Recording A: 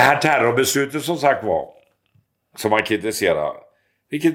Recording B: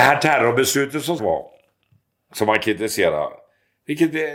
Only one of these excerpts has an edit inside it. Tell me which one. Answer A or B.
B